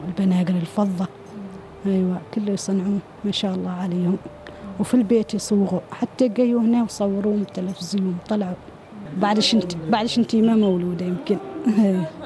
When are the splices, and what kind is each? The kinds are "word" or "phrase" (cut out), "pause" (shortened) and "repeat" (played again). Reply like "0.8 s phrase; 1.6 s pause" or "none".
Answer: none

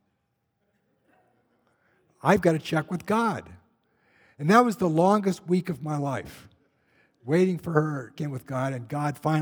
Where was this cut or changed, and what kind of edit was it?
8.2 s phrase

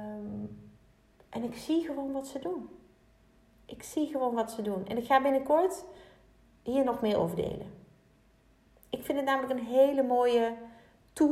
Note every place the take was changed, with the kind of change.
none

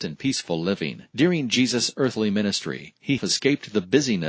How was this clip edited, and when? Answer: 1.1 s pause; 3.2 s word

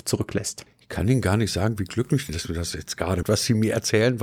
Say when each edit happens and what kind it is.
3.2 s word

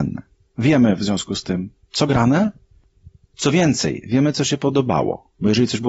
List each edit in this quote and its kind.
2.1 s word

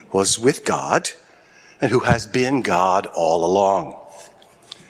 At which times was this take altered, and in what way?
none

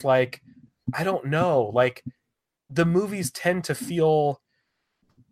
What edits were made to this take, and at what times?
none

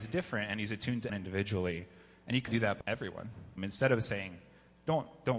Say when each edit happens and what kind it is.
1.1 s word; 2.5 s word; 2.8 s word; 3.6 s word

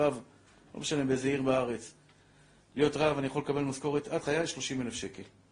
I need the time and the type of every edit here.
4.2 s word

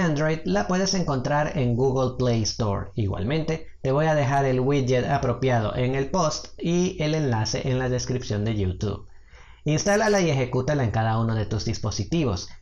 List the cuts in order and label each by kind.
none

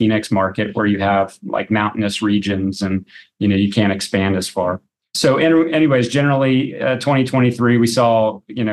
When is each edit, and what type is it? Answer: none

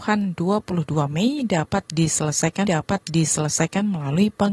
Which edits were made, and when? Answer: 2.6 s repeat

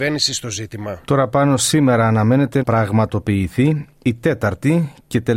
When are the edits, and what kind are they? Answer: 1.0 s pause; 2.6 s word

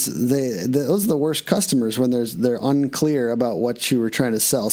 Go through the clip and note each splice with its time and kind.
none

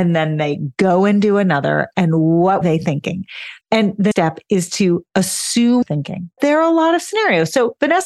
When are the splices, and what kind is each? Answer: 2.6 s word; 3.6 s pause; 4.1 s word; 5.8 s phrase; 6.4 s word

